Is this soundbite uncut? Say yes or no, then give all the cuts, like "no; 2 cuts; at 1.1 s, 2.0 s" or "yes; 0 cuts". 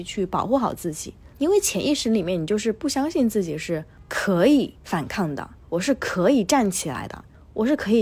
no; 3 cuts; at 1.3 s, 4.8 s, 5.6 s